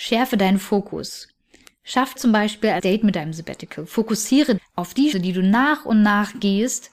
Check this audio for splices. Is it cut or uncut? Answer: cut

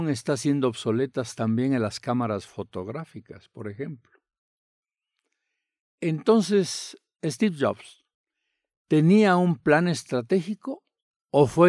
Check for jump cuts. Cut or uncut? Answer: uncut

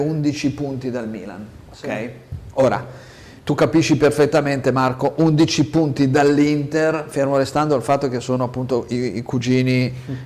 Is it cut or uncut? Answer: cut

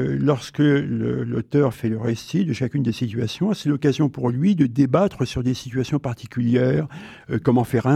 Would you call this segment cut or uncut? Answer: uncut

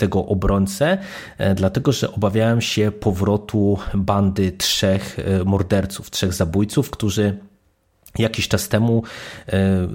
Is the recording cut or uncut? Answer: uncut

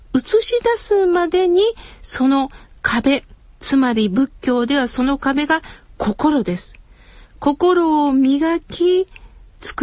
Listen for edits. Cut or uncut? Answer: uncut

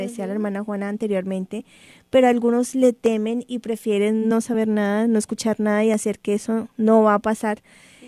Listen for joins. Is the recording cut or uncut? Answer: uncut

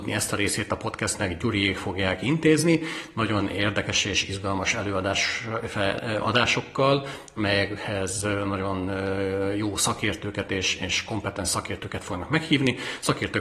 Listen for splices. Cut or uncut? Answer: uncut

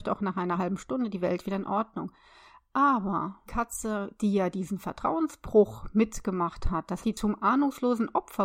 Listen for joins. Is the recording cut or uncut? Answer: cut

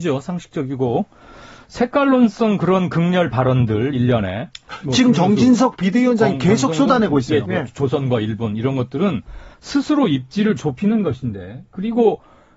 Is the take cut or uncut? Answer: cut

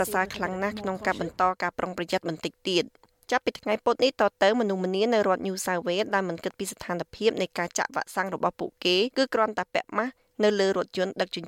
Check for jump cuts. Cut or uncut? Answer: uncut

